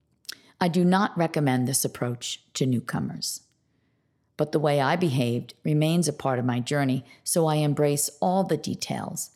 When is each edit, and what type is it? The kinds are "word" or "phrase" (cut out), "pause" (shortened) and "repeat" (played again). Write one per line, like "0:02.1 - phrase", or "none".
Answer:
none